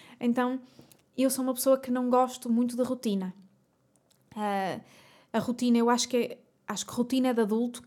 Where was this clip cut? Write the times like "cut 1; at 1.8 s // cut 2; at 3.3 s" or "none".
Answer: none